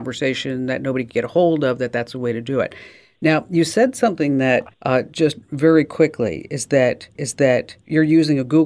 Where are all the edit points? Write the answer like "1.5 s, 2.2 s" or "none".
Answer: 4.7 s, 7.2 s